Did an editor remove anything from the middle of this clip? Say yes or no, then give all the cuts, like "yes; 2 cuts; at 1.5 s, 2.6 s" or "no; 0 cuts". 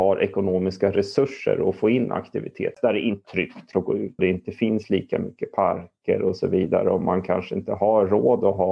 yes; 3 cuts; at 3.2 s, 3.7 s, 4.2 s